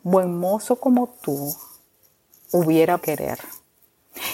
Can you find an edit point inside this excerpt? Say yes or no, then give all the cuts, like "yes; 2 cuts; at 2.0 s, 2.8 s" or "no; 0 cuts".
yes; 1 cut; at 3.0 s